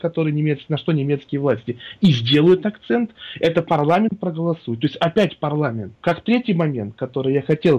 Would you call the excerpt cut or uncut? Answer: cut